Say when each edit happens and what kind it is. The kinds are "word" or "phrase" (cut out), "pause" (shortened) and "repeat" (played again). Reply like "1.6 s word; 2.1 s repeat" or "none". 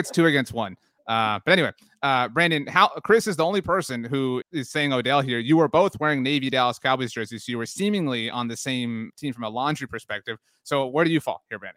4.4 s word; 9.1 s word